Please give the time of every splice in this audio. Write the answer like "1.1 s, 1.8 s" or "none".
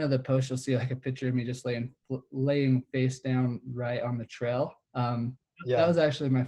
2.0 s, 4.8 s